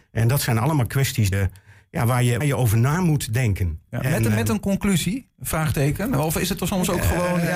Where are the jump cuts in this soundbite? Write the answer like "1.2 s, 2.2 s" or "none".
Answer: 1.3 s, 2.4 s